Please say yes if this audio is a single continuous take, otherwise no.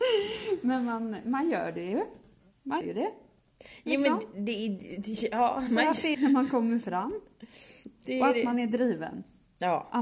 no